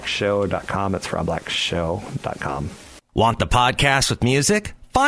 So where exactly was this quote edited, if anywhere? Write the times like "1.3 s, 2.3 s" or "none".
none